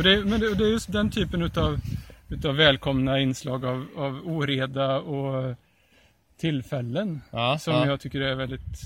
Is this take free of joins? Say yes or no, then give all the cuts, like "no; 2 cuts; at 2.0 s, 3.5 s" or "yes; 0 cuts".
yes; 0 cuts